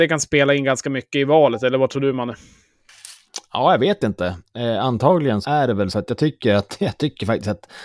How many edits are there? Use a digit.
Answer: 2